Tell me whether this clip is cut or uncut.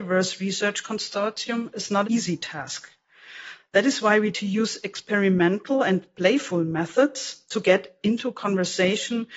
cut